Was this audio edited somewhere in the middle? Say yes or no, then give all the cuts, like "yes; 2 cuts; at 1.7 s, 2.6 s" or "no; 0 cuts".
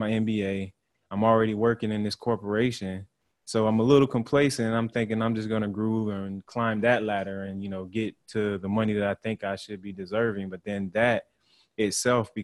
no; 0 cuts